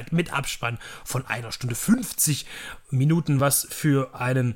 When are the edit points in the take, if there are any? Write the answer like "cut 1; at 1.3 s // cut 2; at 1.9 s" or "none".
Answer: none